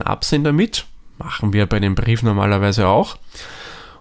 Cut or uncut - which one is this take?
uncut